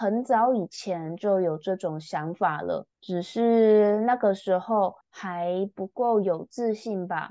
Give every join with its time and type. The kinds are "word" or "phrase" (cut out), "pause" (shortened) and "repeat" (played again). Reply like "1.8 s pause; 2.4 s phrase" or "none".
2.9 s pause; 5.0 s pause